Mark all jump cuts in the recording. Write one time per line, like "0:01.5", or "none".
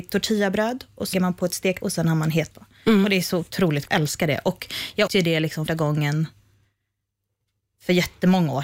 0:01.1
0:01.8
0:02.5
0:03.9
0:05.1
0:05.7

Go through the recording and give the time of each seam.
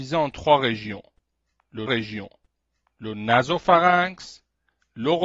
0:01.9

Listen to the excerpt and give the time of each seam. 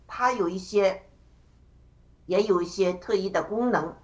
none

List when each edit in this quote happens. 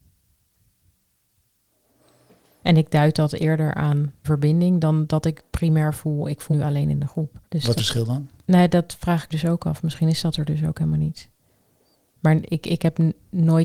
0:04.2
0:05.5
0:06.5
0:07.4
0:07.8
0:09.3

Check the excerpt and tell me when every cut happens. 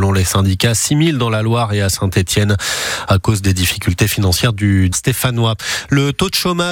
0:04.9

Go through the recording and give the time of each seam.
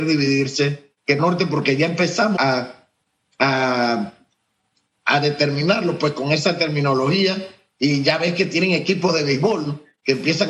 0:01.2
0:02.4

